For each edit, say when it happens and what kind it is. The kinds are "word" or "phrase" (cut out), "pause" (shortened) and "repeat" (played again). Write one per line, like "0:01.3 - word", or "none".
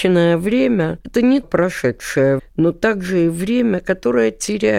0:01.4 - word
0:02.4 - word

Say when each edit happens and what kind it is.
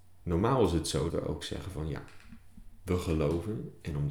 0:01.1 - word

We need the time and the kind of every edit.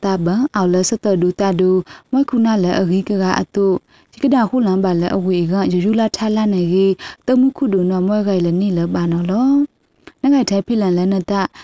none

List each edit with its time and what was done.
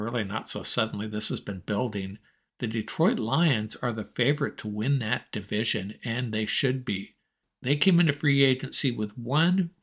none

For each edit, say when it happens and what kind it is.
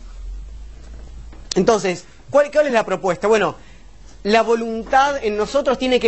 none

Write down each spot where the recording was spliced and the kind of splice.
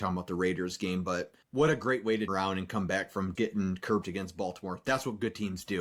0:01.4 - pause
0:02.3 - word
0:03.4 - word
0:04.0 - word

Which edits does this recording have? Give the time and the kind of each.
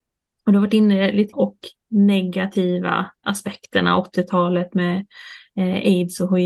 0:01.3 - phrase
0:03.2 - word

